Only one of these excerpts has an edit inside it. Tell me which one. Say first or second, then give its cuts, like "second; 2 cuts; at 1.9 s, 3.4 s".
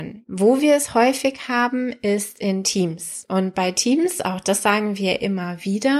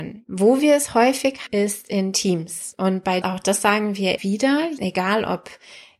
second; 4 cuts; at 1.5 s, 3.2 s, 4.2 s, 4.8 s